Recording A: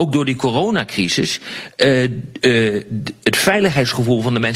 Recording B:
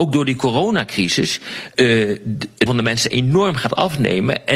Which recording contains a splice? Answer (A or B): B